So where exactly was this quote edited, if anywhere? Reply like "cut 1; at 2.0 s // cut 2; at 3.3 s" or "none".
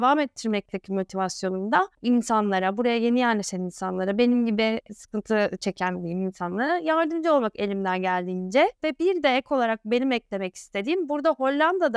none